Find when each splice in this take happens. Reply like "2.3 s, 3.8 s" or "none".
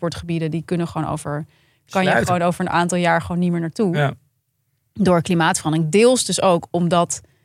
none